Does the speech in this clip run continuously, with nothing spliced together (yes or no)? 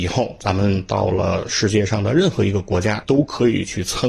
no